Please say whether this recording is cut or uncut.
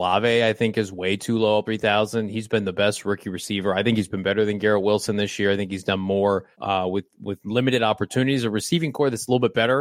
cut